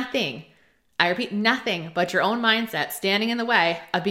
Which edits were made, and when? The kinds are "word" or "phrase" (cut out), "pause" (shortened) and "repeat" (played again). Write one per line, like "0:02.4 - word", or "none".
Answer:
none